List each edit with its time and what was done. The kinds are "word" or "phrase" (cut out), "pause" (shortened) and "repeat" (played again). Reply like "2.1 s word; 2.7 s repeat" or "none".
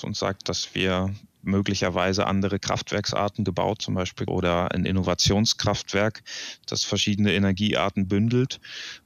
3.8 s word; 4.3 s word